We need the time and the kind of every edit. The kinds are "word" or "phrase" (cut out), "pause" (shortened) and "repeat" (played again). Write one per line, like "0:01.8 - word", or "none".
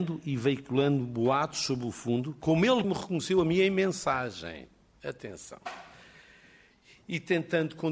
0:02.8 - word